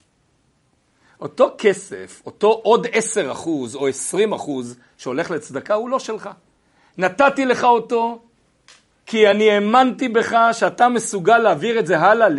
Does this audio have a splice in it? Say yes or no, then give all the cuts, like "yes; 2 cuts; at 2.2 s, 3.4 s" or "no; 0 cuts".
no; 0 cuts